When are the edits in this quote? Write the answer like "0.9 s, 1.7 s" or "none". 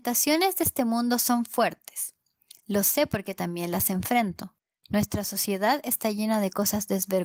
none